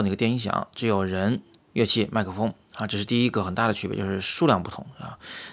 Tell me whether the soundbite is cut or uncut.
cut